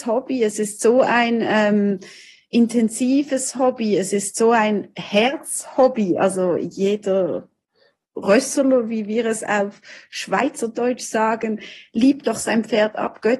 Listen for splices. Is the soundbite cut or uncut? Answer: uncut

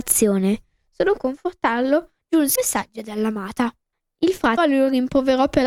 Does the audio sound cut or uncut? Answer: cut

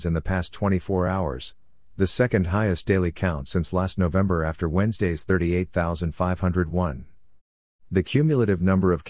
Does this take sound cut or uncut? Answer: uncut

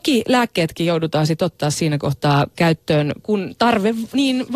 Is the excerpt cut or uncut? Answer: uncut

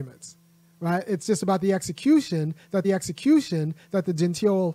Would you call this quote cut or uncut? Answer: cut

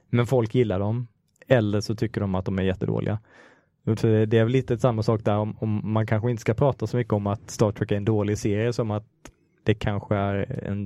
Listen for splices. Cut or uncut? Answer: uncut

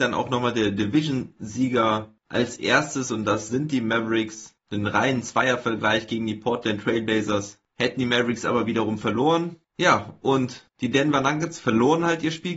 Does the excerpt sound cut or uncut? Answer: uncut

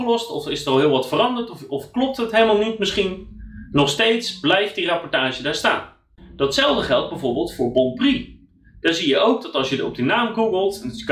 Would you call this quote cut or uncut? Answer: uncut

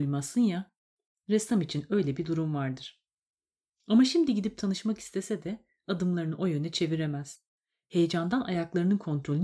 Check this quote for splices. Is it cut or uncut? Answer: uncut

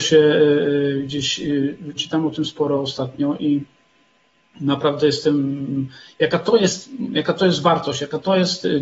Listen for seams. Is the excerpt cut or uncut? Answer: cut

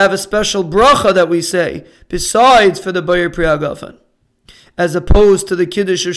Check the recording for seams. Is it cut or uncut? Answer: uncut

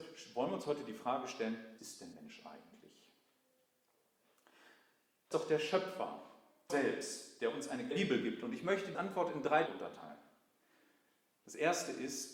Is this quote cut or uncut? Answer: cut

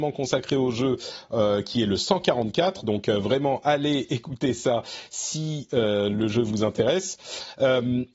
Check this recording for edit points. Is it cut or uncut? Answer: uncut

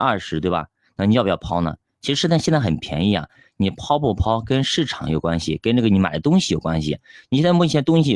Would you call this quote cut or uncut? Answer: uncut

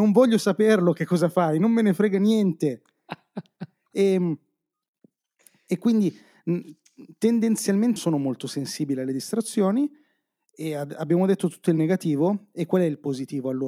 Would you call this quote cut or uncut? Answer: cut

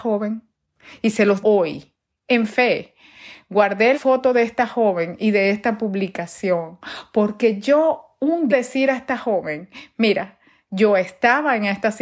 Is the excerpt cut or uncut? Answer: cut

